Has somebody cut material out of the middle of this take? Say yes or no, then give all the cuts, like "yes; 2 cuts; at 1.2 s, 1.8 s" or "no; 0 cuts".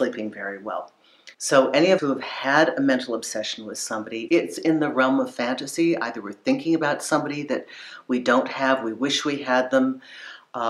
yes; 3 cuts; at 1.3 s, 2.0 s, 4.3 s